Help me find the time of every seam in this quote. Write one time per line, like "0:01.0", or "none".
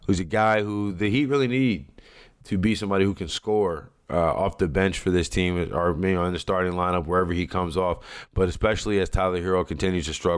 none